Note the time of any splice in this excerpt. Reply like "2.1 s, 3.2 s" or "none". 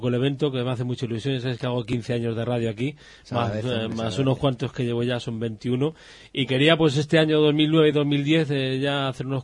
none